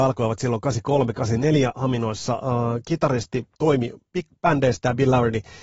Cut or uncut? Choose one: cut